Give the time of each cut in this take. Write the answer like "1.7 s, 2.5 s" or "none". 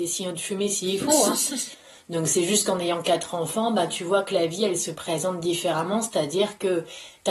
none